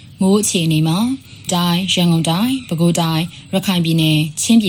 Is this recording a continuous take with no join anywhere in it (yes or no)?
no